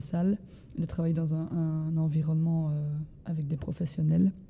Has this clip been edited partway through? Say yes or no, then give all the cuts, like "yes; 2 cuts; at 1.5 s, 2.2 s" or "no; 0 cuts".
no; 0 cuts